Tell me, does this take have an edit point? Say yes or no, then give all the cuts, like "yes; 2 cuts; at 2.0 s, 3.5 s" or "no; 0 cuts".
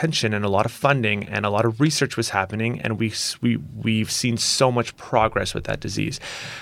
no; 0 cuts